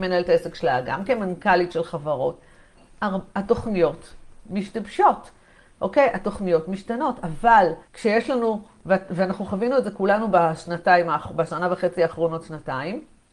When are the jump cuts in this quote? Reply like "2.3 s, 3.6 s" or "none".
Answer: 7.8 s

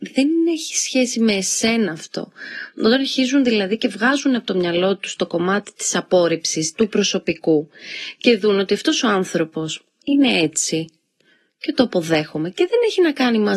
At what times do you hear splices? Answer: none

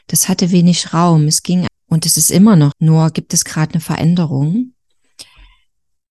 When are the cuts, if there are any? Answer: 1.7 s, 2.7 s

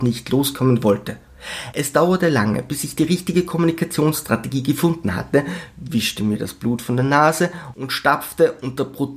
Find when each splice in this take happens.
none

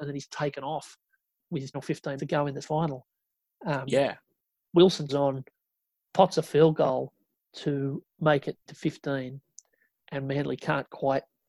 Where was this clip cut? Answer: 1.7 s, 2.2 s, 2.6 s, 5.1 s, 7.5 s, 8.7 s

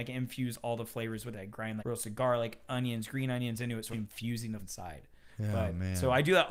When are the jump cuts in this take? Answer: 1.8 s, 3.9 s, 4.6 s

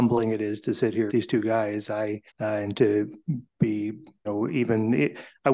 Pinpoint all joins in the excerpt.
1.1 s, 2.3 s, 4.3 s

